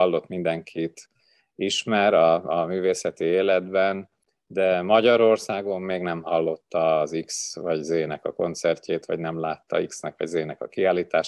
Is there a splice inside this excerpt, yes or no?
no